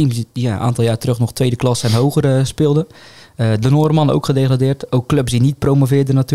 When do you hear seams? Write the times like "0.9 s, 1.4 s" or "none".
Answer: none